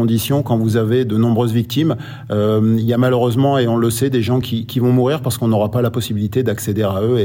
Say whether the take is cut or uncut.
uncut